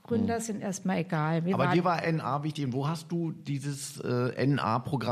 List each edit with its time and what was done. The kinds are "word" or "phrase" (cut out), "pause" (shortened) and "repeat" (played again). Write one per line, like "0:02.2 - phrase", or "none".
none